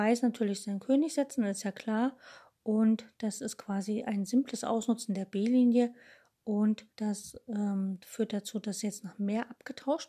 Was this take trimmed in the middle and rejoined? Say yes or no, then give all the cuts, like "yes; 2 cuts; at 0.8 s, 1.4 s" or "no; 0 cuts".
yes; 1 cut; at 6.9 s